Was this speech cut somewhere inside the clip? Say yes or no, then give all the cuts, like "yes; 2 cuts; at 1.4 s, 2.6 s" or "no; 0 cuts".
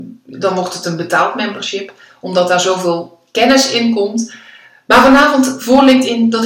no; 0 cuts